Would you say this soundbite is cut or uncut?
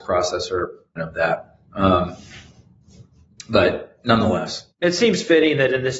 cut